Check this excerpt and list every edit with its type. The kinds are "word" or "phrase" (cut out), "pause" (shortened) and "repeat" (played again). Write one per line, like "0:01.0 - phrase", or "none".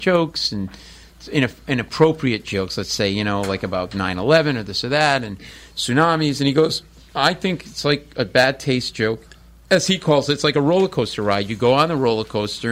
none